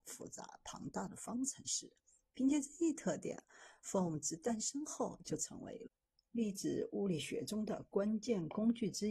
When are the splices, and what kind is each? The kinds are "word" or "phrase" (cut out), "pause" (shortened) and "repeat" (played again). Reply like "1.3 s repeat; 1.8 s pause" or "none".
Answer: none